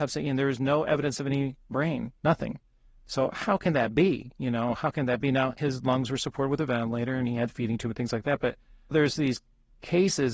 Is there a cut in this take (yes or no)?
yes